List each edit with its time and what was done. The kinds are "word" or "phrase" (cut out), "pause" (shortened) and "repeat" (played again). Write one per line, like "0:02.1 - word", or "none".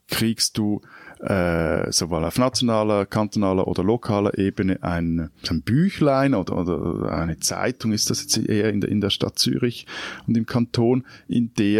0:05.4 - pause